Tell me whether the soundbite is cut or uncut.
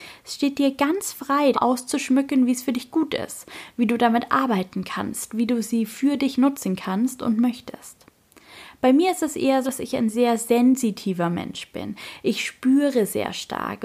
cut